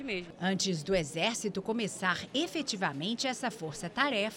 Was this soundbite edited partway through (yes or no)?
no